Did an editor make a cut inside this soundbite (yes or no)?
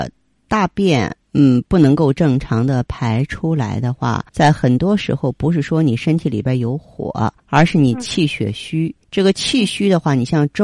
yes